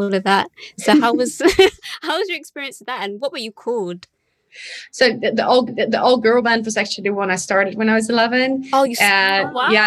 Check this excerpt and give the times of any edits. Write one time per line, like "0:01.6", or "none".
0:05.7